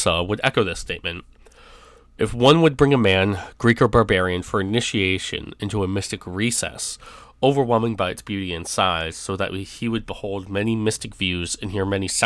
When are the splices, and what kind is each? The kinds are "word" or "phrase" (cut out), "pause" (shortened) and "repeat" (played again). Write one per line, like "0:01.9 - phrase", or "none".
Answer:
none